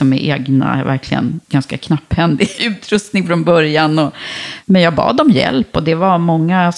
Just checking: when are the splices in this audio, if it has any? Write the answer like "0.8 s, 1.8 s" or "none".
1.4 s, 2.6 s